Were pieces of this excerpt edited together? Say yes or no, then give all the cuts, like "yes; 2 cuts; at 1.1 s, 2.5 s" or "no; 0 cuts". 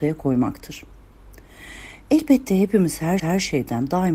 yes; 1 cut; at 3.2 s